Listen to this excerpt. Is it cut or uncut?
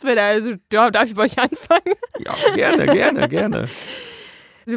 uncut